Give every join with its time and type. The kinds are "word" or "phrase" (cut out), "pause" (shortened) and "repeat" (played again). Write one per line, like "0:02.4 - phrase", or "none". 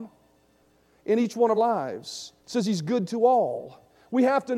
0:01.6 - word
0:02.4 - pause